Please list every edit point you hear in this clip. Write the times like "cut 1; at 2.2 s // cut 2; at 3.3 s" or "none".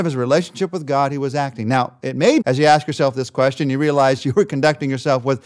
cut 1; at 2.4 s